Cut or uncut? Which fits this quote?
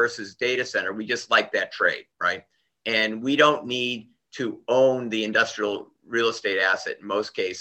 cut